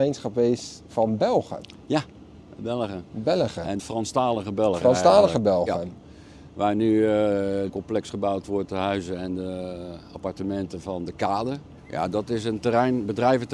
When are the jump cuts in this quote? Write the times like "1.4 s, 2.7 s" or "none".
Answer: 3.8 s, 7.7 s, 11.8 s